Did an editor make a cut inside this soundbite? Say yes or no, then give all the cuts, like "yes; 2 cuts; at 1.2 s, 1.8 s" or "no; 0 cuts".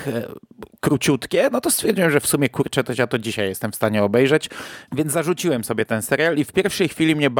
no; 0 cuts